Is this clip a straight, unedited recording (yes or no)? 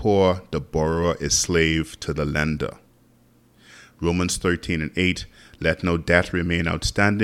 yes